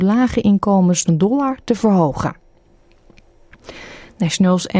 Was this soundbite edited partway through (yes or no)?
yes